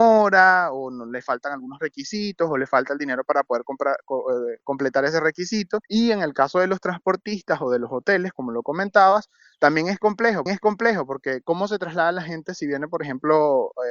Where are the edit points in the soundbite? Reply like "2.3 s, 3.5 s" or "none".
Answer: 5.8 s, 10.5 s